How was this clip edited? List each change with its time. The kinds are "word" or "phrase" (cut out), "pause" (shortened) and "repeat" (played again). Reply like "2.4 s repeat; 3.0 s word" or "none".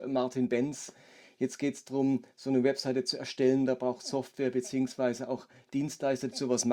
none